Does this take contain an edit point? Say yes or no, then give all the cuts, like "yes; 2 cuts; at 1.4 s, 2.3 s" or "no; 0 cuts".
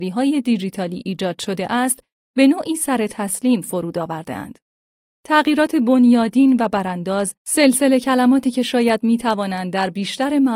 yes; 1 cut; at 7.4 s